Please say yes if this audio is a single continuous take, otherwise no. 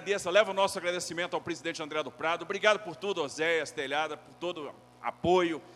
yes